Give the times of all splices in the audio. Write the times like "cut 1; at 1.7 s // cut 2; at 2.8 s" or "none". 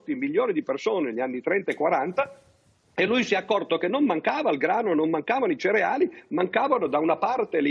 none